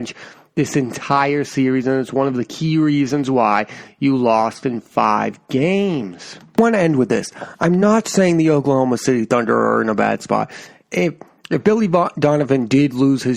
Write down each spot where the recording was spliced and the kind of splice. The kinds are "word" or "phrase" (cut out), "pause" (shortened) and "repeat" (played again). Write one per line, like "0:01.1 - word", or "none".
none